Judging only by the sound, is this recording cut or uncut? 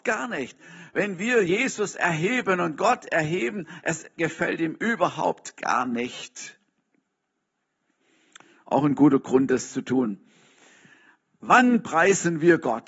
uncut